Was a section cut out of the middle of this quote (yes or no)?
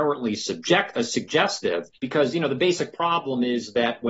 yes